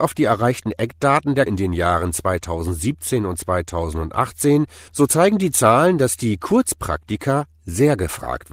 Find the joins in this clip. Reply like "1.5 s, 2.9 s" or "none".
1.5 s, 4.9 s